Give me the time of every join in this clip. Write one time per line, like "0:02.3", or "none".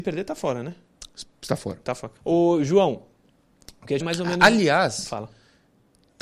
0:02.2
0:04.0